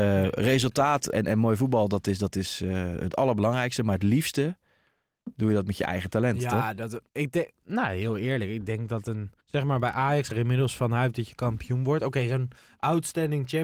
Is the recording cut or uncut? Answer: cut